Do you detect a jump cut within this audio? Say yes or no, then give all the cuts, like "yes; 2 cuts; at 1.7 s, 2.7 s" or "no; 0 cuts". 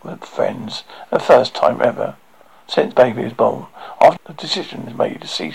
yes; 2 cuts; at 2.9 s, 4.2 s